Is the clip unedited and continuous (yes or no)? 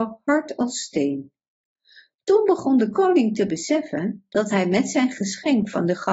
yes